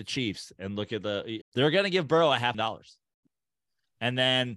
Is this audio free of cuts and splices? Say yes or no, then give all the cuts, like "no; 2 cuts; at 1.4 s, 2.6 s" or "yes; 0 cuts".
no; 2 cuts; at 1.4 s, 2.5 s